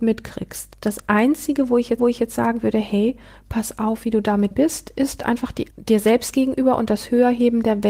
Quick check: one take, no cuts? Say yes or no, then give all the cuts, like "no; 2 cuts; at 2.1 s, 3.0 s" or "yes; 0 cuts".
no; 3 cuts; at 2.0 s, 4.5 s, 5.7 s